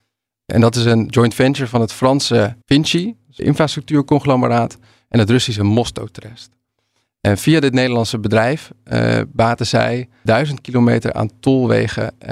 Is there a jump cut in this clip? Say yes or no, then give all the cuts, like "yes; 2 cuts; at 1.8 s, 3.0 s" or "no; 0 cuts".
yes; 3 cuts; at 2.6 s, 3.4 s, 10.3 s